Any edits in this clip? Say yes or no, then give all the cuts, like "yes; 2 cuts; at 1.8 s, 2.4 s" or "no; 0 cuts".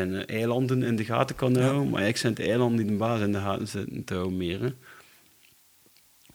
no; 0 cuts